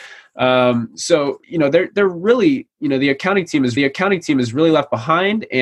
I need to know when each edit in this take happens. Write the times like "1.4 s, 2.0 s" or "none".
1.4 s, 3.8 s

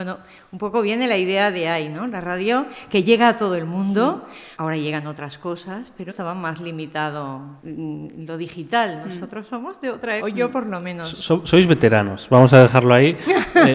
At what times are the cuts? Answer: 4.5 s, 6.1 s, 7.6 s, 10.2 s

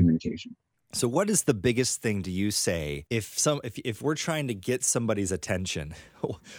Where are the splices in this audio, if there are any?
3.1 s

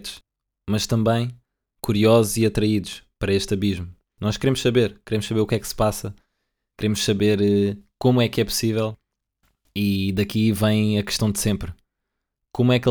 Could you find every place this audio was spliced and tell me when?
none

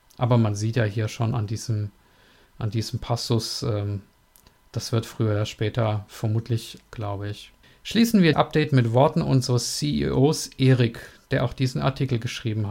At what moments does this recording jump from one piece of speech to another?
6.9 s, 7.6 s, 8.3 s

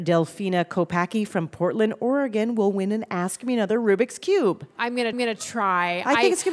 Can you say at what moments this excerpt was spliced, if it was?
5.1 s

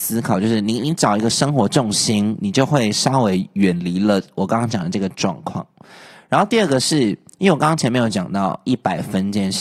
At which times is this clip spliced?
none

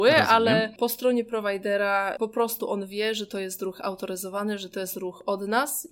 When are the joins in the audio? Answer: none

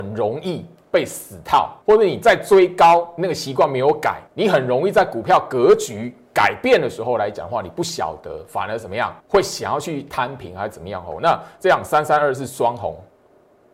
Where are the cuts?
1.8 s, 4.3 s, 9.2 s

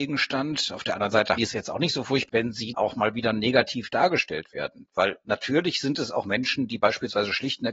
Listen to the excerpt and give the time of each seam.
1.4 s, 2.3 s, 2.7 s

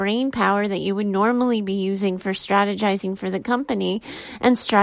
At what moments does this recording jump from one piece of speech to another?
none

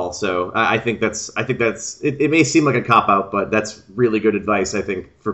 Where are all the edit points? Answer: none

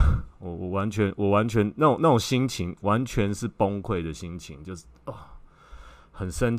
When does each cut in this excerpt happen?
none

